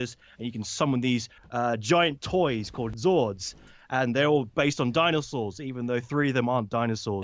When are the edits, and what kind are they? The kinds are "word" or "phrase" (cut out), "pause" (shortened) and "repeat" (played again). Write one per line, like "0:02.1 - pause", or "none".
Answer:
0:01.4 - pause